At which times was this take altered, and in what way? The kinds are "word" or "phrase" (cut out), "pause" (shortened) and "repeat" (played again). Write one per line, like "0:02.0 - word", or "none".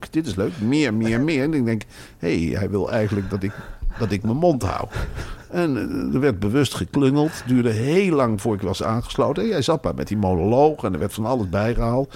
none

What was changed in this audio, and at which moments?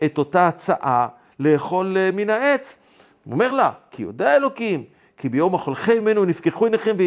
none

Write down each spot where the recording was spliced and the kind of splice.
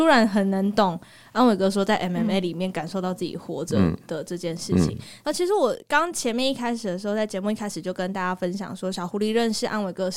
none

